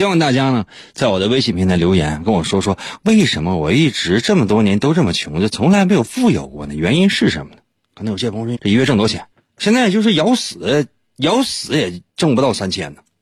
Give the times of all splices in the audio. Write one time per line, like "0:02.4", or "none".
0:08.6
0:09.3
0:12.1